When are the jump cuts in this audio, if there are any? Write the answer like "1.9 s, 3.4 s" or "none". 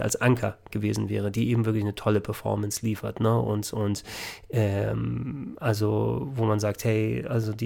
none